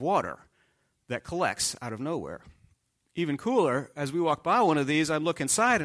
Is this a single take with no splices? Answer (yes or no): no